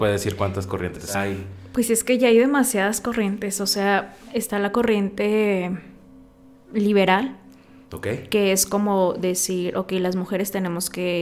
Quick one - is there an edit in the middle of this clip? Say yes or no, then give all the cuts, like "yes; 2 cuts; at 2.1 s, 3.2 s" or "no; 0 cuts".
no; 0 cuts